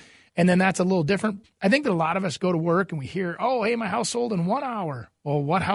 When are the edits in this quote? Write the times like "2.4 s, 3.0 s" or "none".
1.4 s